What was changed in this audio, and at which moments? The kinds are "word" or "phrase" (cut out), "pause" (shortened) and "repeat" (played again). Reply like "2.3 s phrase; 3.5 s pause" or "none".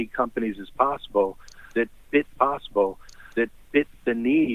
2.3 s repeat